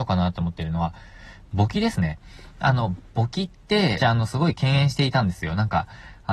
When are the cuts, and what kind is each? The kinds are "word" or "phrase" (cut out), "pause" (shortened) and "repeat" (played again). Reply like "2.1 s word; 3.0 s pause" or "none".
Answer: 4.0 s word